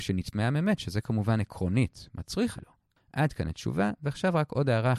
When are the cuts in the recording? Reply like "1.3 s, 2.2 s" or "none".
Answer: 2.6 s